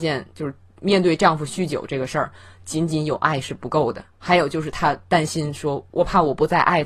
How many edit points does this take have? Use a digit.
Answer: 1